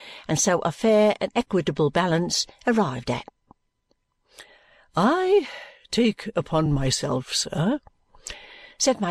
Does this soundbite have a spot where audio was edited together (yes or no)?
no